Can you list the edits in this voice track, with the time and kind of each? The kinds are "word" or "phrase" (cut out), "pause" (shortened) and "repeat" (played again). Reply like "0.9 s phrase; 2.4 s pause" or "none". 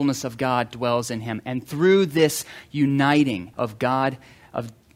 3.5 s pause